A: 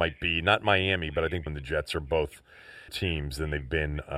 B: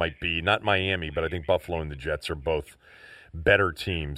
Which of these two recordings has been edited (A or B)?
A